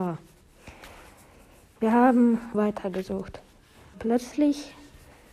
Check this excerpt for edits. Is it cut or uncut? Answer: cut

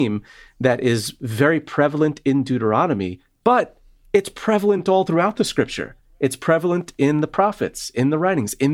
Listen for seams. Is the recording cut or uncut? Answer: uncut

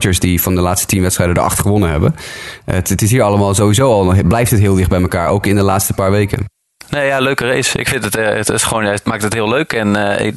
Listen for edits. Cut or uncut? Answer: uncut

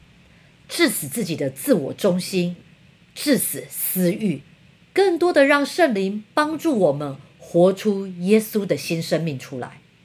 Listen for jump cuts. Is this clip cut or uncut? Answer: uncut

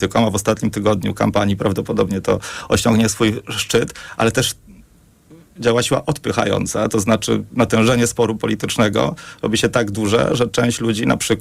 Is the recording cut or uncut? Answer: uncut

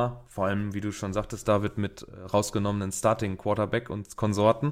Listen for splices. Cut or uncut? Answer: uncut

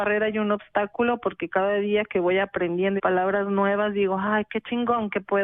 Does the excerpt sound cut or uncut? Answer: cut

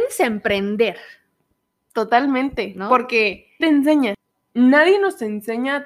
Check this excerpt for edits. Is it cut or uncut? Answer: cut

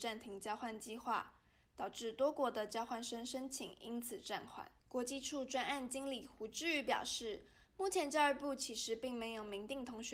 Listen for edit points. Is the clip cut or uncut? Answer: cut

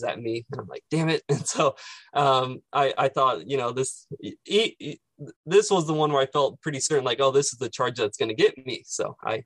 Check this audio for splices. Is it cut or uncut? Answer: cut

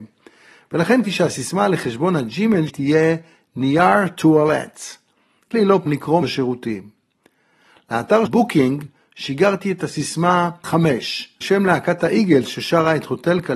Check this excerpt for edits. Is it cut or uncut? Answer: cut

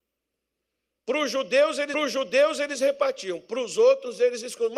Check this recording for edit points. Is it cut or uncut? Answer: cut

